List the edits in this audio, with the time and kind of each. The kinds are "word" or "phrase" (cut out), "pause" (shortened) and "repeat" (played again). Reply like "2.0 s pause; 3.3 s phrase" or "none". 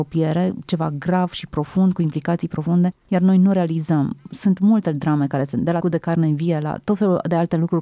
5.8 s word